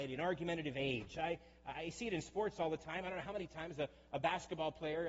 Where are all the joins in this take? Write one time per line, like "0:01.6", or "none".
none